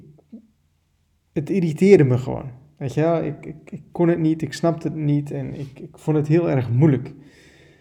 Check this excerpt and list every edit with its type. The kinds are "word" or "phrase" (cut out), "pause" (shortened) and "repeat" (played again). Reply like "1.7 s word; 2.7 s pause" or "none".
none